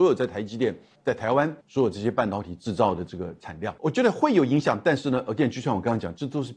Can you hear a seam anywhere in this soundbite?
yes; 2 cuts; at 1.0 s, 1.6 s

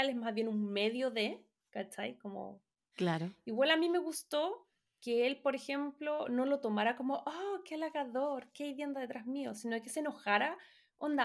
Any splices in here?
no; 0 cuts

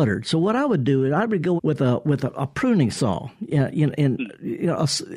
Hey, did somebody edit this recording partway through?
yes; 1 cut; at 1.6 s

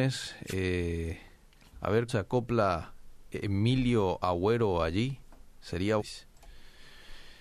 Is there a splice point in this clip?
yes; 2 cuts; at 2.1 s, 6.0 s

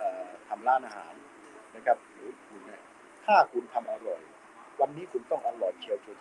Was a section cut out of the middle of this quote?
no; 0 cuts

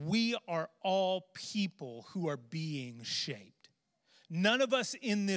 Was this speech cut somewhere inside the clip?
no; 0 cuts

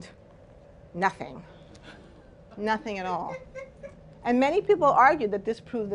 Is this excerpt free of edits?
yes; 0 cuts

